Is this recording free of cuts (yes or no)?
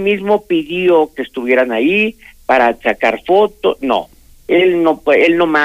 yes